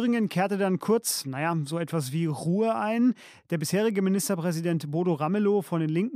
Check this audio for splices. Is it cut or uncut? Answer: uncut